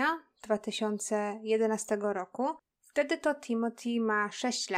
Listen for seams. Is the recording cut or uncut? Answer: uncut